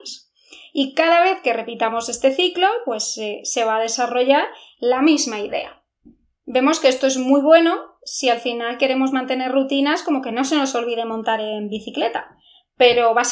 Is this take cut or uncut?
uncut